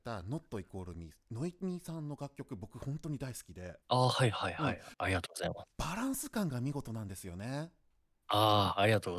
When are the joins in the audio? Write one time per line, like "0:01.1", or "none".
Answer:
0:03.8